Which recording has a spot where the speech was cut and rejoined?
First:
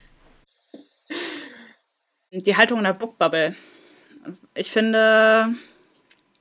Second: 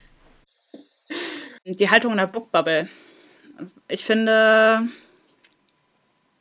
second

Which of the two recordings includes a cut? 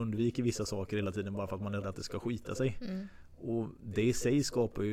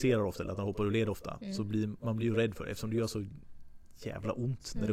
first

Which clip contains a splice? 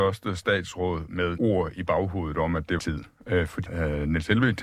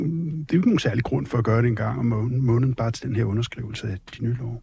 first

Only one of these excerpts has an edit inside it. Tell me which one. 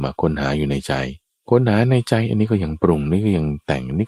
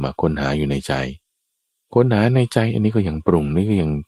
first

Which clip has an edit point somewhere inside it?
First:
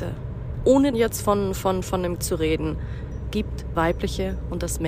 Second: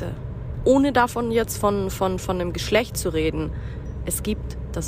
first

